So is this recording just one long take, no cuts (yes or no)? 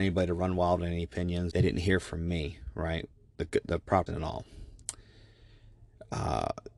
no